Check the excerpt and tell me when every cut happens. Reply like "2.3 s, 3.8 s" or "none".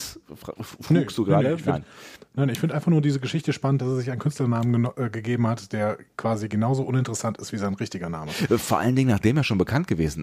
none